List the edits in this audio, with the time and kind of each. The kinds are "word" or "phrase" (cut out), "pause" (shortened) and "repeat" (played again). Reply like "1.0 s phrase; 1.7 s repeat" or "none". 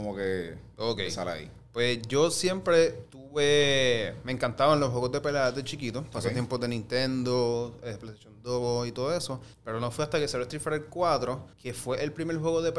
9.5 s pause; 11.5 s pause